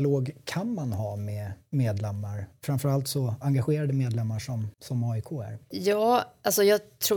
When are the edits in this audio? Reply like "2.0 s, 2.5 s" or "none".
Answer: 4.7 s